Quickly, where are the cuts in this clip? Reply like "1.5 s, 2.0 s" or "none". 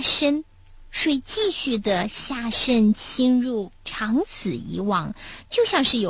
3.8 s

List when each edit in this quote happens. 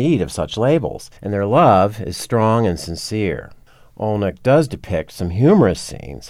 1.2 s, 3.6 s

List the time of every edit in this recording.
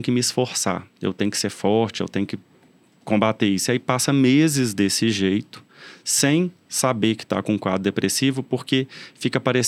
none

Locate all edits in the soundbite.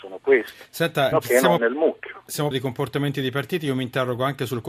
1.1 s, 1.6 s, 2.5 s

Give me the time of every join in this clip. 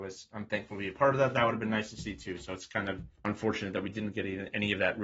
3.2 s

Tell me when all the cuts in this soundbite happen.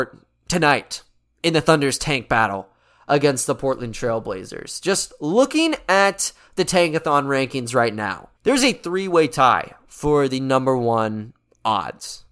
8.4 s

